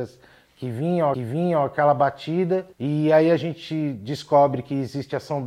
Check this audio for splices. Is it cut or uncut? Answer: cut